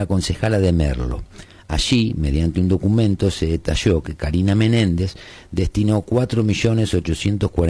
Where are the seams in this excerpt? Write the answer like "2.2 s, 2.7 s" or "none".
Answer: none

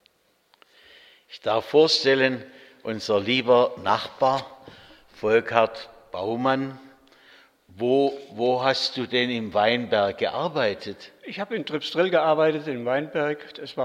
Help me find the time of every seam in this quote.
none

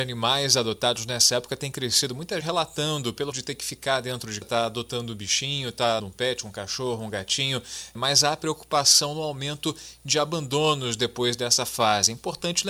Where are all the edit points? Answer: 2.4 s, 3.3 s, 4.4 s, 6.0 s

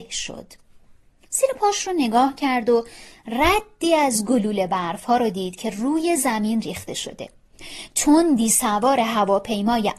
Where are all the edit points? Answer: none

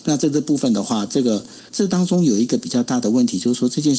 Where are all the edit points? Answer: 1.7 s

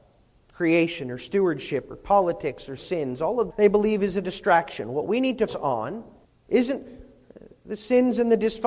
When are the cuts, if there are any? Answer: 2.8 s, 3.5 s, 5.5 s, 6.2 s

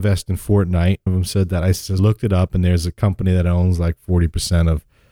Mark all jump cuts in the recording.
1.1 s, 2.0 s

